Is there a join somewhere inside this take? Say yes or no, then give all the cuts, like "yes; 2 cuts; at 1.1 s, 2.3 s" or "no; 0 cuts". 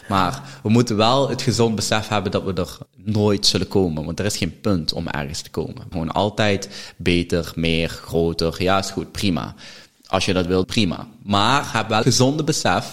yes; 4 cuts; at 2.9 s, 5.9 s, 10.6 s, 12.0 s